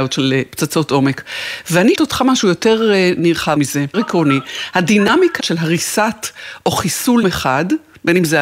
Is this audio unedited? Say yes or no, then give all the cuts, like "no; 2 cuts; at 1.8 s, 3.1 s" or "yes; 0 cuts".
no; 6 cuts; at 1.9 s, 2.4 s, 3.6 s, 3.9 s, 5.4 s, 7.2 s